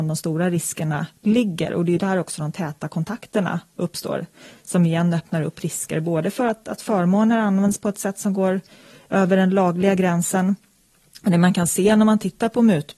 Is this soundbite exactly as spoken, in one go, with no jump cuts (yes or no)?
yes